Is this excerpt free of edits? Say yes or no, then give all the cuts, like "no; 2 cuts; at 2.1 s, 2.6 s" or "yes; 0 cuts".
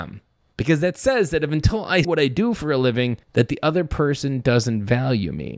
no; 2 cuts; at 2.0 s, 3.2 s